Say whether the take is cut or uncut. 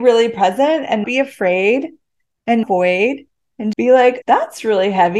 cut